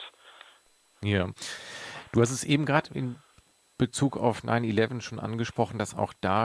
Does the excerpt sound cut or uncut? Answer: uncut